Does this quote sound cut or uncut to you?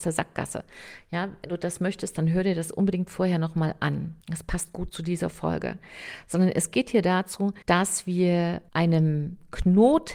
cut